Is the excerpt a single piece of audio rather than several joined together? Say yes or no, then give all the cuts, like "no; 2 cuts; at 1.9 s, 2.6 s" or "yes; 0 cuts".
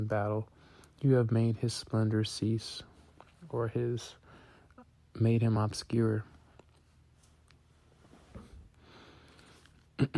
yes; 0 cuts